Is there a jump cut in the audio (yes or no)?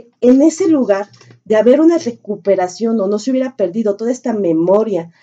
no